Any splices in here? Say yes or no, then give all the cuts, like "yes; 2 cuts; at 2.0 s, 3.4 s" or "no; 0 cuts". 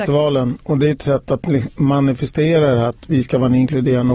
no; 0 cuts